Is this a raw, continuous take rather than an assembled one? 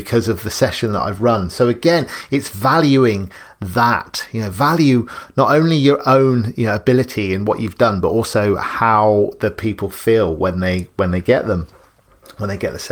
yes; 0 cuts

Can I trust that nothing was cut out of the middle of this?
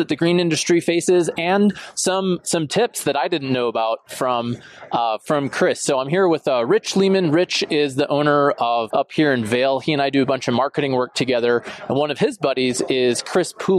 no; 1 cut; at 8.9 s

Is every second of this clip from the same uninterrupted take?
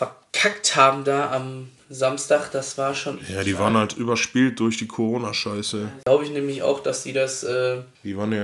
yes; 0 cuts

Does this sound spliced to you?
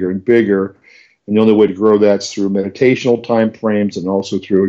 no; 0 cuts

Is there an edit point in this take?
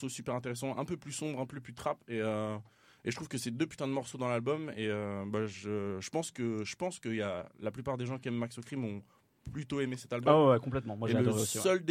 no; 0 cuts

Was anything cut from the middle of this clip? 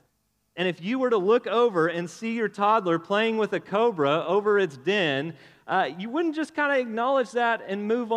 no; 0 cuts

